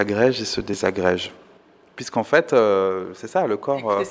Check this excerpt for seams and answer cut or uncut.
uncut